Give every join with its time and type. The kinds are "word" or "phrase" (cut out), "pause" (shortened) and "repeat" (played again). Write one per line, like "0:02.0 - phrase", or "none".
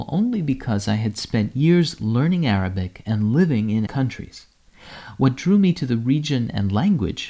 0:03.9 - word